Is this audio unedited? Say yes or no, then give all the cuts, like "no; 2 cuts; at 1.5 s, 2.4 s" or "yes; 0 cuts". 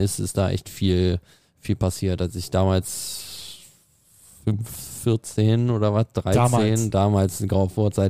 yes; 0 cuts